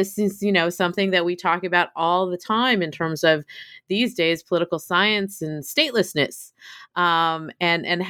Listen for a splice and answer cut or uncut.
uncut